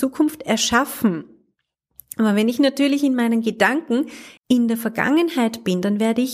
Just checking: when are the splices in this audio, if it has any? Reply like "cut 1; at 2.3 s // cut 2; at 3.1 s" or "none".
cut 1; at 4.4 s